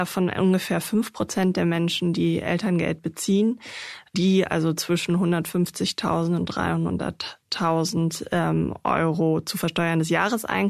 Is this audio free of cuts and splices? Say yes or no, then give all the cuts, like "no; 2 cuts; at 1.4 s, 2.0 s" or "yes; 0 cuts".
yes; 0 cuts